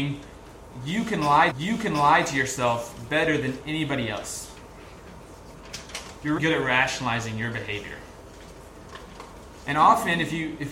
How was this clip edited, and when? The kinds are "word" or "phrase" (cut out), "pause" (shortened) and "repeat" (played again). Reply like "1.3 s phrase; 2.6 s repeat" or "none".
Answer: 1.5 s repeat; 6.4 s word